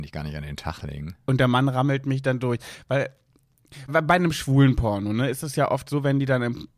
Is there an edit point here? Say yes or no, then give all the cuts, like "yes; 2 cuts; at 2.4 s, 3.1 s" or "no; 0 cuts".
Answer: yes; 1 cut; at 3.9 s